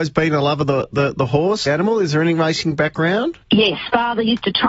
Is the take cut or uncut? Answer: cut